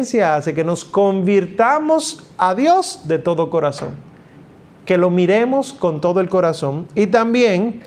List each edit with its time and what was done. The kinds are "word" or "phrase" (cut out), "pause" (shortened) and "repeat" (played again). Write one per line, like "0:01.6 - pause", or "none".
none